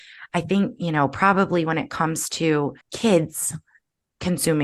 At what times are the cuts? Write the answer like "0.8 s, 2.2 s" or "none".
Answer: 2.8 s

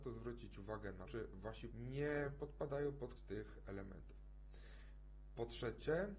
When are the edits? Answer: 1.0 s, 1.7 s, 3.2 s

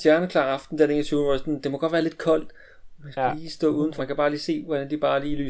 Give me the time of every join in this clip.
4.0 s

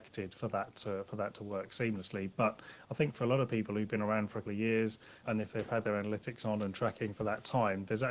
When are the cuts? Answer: 4.4 s, 5.2 s

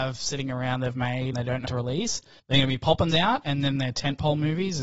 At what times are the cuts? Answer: 1.3 s, 1.7 s, 2.4 s, 3.1 s

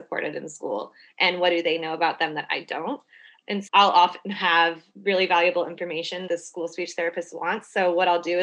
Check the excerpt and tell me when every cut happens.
3.7 s, 6.3 s

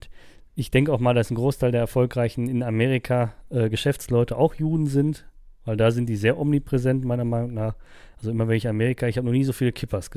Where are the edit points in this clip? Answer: none

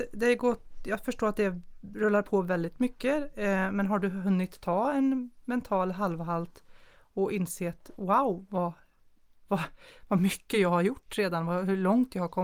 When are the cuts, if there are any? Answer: none

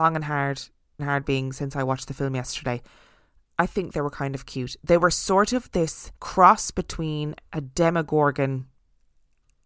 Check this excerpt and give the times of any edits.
1.0 s, 6.2 s

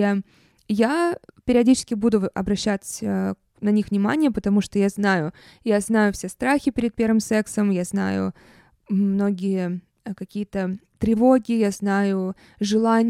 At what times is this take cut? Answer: none

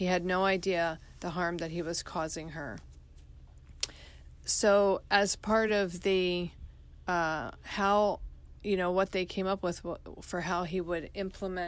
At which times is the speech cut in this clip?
none

